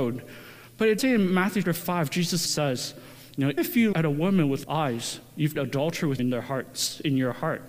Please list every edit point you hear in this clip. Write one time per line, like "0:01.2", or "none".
0:01.0
0:01.6
0:02.5
0:03.6
0:03.9
0:04.6
0:05.5
0:06.2